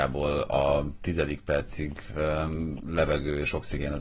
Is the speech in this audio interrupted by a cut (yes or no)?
no